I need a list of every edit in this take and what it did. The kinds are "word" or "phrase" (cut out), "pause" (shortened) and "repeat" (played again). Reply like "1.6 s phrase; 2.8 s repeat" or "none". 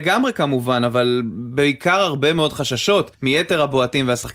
3.1 s pause